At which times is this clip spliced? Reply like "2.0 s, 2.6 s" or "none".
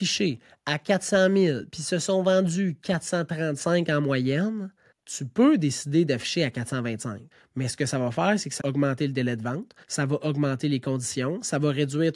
4.9 s, 7.3 s, 8.6 s, 9.8 s